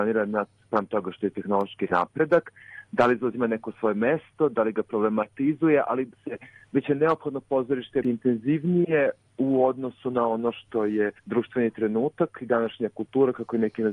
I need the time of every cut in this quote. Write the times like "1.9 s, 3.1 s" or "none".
6.1 s, 8.0 s, 11.2 s